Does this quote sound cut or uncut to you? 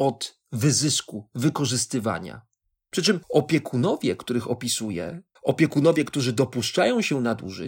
cut